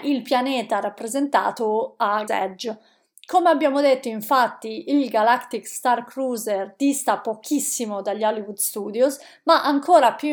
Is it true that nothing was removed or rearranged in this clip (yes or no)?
no